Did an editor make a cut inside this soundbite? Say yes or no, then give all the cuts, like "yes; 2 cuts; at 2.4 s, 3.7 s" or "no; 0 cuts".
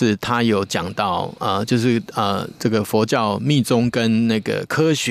no; 0 cuts